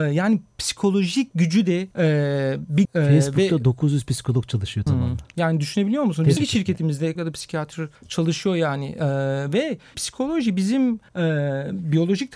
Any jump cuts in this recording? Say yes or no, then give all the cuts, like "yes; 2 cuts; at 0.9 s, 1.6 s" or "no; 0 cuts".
yes; 8 cuts; at 1.9 s, 2.8 s, 4.9 s, 6.4 s, 7.2 s, 8.0 s, 9.9 s, 11.1 s